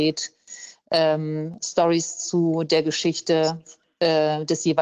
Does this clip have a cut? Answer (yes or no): no